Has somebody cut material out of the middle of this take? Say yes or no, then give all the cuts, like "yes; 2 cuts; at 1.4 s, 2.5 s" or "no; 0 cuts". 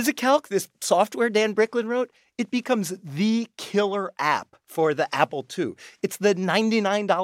no; 0 cuts